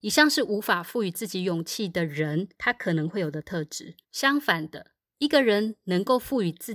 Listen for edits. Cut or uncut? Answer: cut